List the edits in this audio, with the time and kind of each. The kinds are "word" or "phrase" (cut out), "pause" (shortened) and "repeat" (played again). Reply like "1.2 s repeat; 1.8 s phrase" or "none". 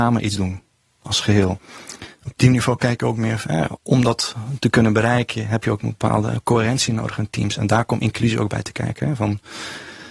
none